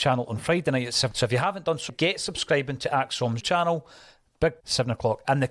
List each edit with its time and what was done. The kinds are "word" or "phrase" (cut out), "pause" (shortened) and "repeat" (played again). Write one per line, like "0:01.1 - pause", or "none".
0:01.1 - word
0:01.9 - word
0:03.4 - word
0:04.6 - word